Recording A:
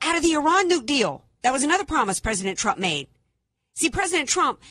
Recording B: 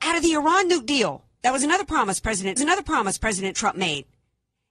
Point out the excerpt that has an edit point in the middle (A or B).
B